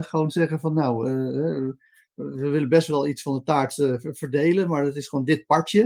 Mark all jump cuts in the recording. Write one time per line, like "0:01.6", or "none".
none